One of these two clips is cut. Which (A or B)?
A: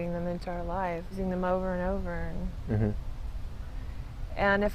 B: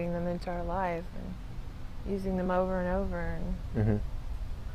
A